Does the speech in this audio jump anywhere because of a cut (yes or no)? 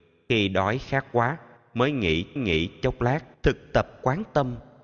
yes